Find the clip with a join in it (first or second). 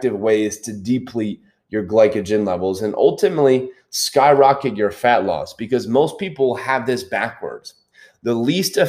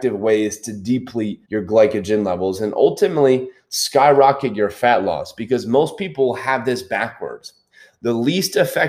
second